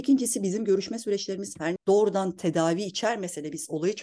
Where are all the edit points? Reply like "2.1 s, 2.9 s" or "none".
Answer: 1.8 s